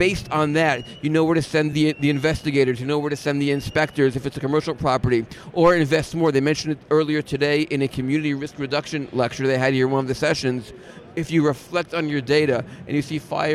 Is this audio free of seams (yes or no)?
yes